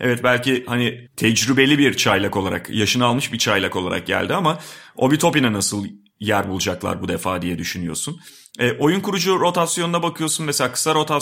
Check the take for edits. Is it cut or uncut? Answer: uncut